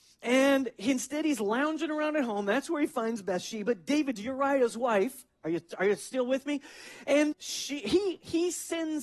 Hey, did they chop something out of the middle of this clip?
yes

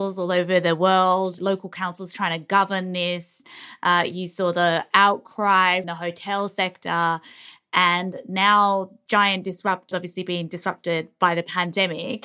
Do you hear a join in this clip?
yes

